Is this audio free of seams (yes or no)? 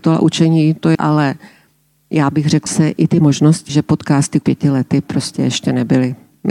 no